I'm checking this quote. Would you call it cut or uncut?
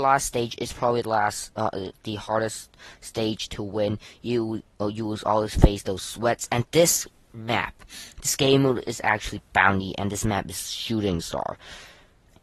uncut